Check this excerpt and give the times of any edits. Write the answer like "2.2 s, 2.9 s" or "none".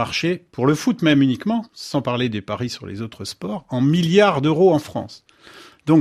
1.7 s